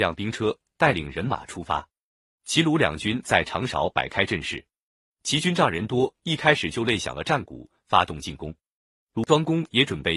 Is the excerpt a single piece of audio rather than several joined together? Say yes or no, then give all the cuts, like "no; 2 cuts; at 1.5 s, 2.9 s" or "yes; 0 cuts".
yes; 0 cuts